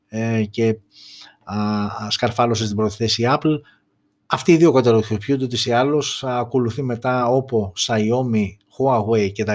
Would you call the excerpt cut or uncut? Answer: uncut